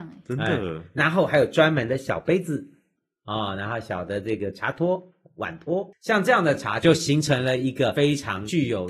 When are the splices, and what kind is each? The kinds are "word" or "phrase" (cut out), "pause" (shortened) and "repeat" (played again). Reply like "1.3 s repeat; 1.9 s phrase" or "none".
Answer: none